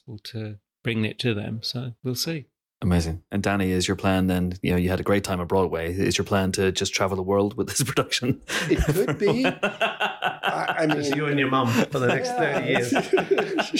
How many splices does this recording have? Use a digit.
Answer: 1